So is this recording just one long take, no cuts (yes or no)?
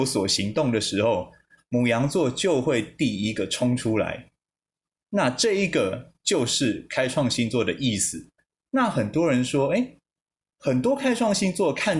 yes